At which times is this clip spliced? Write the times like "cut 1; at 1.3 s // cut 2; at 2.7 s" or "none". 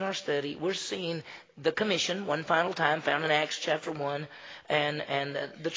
none